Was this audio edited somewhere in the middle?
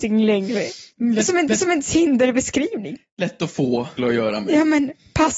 yes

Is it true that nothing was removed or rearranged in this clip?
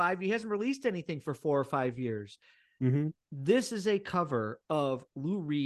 no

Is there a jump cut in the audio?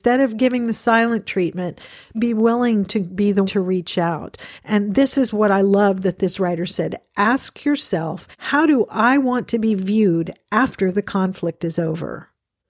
yes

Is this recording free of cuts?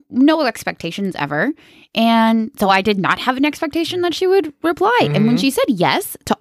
yes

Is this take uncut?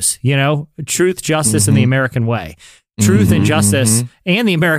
yes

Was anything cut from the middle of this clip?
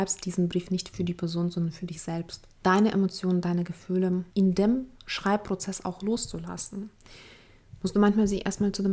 yes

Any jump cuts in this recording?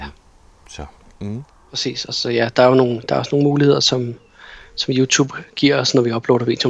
yes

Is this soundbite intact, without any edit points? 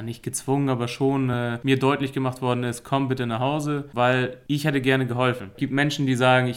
yes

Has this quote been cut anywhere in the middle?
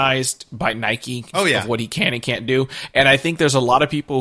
yes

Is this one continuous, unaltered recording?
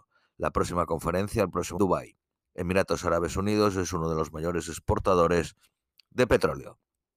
no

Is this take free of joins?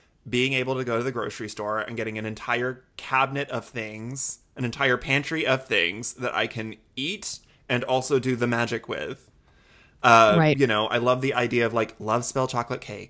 yes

